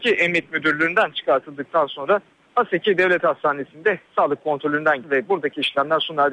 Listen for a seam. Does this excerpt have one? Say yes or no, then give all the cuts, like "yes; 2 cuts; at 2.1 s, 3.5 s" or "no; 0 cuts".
yes; 1 cut; at 5.0 s